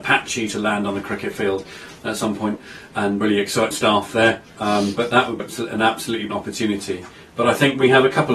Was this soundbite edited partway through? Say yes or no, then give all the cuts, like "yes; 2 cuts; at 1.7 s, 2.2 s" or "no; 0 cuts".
yes; 5 cuts; at 3.2 s, 3.7 s, 4.5 s, 5.4 s, 6.3 s